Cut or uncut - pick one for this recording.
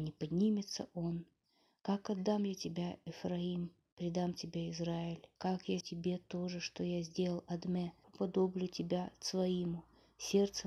cut